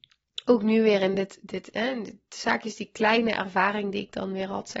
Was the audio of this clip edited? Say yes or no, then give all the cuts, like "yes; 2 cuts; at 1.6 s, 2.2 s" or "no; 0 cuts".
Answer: no; 0 cuts